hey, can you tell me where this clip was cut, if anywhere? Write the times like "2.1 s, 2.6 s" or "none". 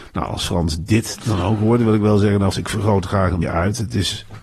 2.5 s, 3.4 s